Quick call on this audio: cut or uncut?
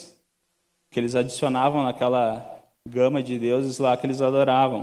cut